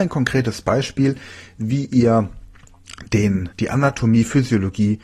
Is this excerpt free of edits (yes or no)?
no